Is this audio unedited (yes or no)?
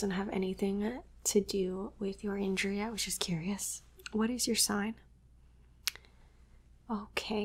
yes